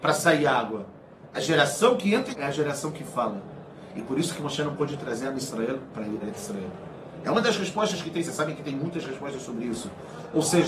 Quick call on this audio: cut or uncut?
cut